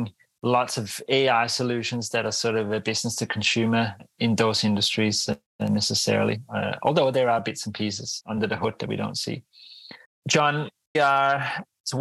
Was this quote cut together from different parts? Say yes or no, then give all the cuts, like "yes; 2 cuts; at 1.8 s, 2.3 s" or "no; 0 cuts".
yes; 1 cut; at 10.9 s